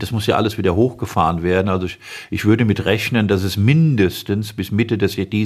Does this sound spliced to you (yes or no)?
no